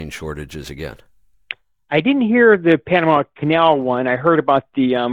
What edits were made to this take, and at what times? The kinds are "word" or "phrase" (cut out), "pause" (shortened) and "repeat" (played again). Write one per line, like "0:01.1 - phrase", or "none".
none